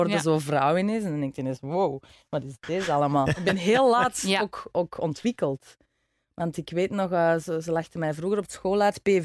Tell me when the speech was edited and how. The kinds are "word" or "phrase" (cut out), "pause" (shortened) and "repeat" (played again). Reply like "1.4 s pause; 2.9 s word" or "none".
none